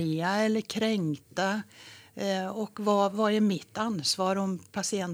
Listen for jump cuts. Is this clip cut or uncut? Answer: uncut